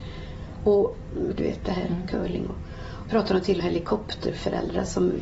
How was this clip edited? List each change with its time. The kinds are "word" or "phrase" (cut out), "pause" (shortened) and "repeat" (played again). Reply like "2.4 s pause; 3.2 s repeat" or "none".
1.4 s word; 3.1 s phrase; 3.6 s phrase